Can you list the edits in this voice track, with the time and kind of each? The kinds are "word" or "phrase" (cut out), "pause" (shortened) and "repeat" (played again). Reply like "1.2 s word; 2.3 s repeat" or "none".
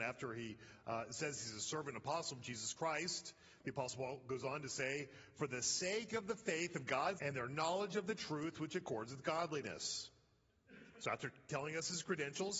7.2 s word